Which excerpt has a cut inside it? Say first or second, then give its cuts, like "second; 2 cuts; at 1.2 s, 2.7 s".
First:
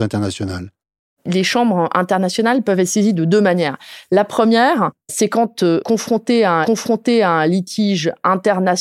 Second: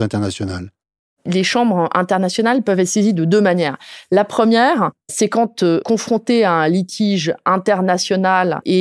first; 1 cut; at 6.6 s